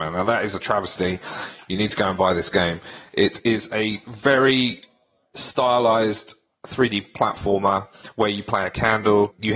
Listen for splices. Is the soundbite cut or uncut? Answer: uncut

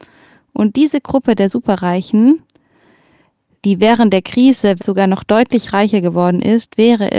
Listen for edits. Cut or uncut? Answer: cut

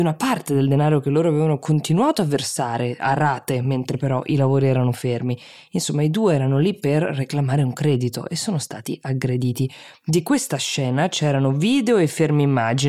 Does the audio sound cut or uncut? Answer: uncut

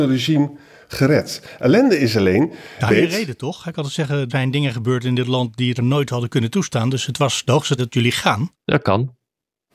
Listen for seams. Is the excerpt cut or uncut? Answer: cut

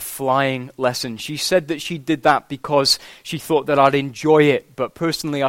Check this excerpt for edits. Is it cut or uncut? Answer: uncut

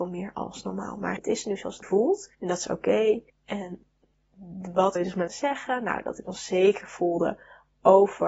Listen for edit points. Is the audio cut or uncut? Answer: cut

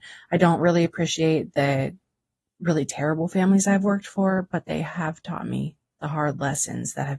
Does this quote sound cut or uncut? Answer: uncut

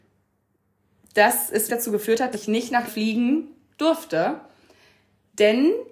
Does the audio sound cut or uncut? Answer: cut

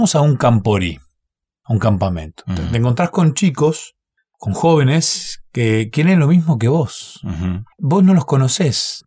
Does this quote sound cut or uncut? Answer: uncut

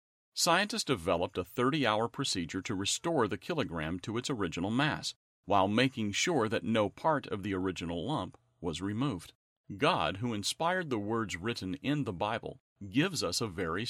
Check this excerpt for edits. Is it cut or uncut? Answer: uncut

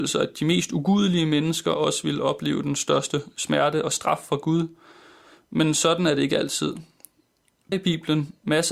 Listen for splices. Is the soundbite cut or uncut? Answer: cut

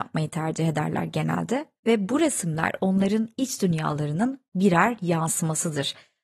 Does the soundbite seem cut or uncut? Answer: uncut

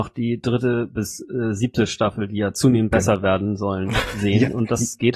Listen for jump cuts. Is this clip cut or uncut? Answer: uncut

